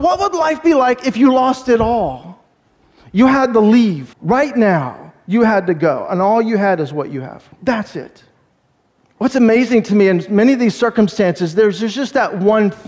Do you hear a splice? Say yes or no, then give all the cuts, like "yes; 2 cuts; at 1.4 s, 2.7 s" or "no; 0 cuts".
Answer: yes; 4 cuts; at 2.6 s, 4.1 s, 7.5 s, 8.9 s